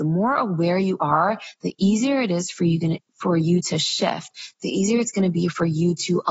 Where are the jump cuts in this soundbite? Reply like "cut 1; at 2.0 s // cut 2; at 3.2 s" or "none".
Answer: none